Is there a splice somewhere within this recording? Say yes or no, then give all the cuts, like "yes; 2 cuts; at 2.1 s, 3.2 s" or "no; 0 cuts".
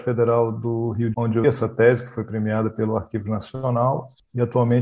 yes; 2 cuts; at 1.1 s, 1.4 s